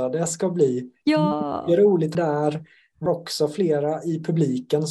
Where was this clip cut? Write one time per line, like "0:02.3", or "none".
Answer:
0:02.1
0:03.1